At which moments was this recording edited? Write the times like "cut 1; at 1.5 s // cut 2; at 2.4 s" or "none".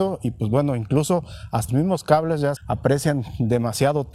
cut 1; at 1.7 s // cut 2; at 2.6 s